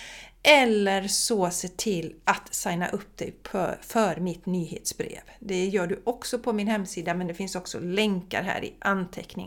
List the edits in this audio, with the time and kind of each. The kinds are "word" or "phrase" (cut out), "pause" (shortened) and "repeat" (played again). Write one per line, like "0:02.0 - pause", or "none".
none